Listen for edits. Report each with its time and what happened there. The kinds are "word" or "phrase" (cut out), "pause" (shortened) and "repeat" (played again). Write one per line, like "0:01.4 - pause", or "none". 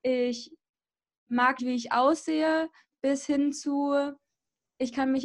0:01.6 - word

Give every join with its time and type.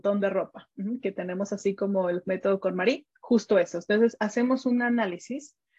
0:03.2 - pause

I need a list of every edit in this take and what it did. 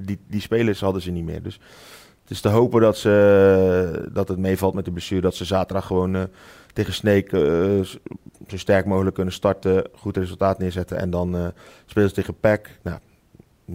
none

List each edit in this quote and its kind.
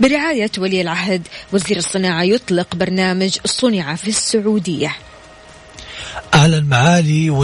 none

